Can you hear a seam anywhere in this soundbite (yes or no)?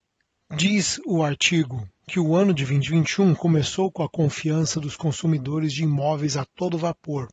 no